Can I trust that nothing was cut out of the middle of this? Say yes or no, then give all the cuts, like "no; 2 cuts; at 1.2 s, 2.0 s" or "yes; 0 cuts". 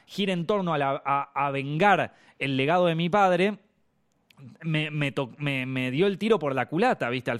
yes; 0 cuts